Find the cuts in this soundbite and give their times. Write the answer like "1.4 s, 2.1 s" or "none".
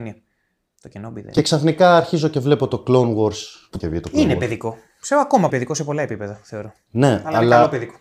3.8 s, 5.5 s